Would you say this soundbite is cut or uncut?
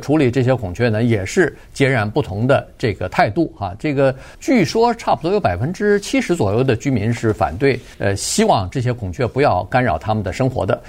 cut